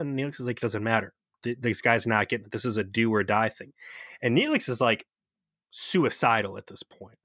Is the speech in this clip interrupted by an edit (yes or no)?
no